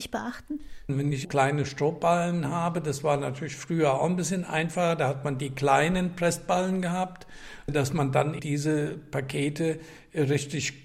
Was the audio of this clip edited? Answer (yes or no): no